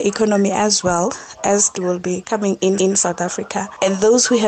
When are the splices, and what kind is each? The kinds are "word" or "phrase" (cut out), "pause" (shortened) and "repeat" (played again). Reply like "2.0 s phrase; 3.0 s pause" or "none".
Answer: 1.4 s word; 1.7 s word; 2.8 s repeat

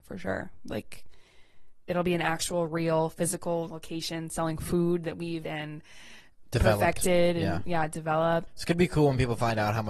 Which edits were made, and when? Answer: 3.7 s word; 5.4 s word; 8.5 s word

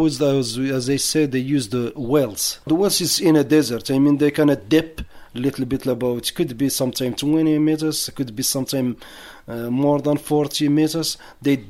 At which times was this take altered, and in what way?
2.6 s pause

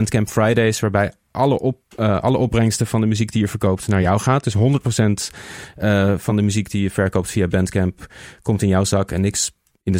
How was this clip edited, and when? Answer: none

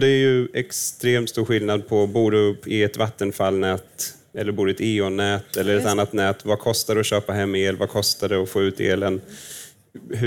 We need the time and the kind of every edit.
none

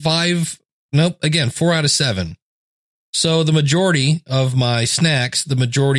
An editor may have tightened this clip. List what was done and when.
none

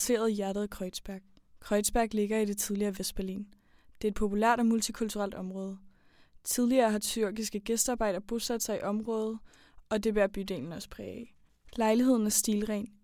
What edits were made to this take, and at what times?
none

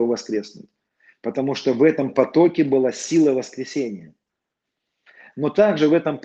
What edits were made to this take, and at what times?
none

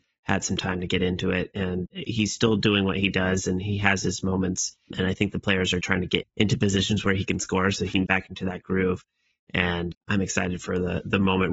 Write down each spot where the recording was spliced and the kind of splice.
1.9 s word; 4.9 s word; 5.8 s word; 6.2 s word; 8.1 s word; 9.9 s word

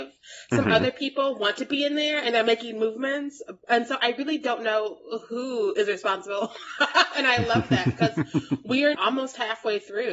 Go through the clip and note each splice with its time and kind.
8.9 s word

